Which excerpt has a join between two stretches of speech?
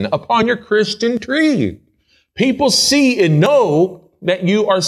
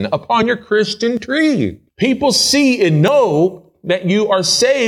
second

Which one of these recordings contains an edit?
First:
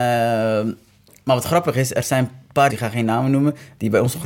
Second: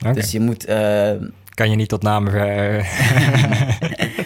first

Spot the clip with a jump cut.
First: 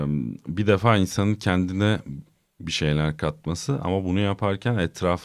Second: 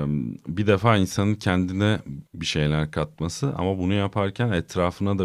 second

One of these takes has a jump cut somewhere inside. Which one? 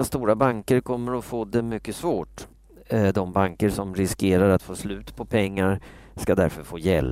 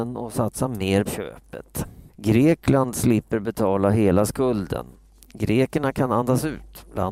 second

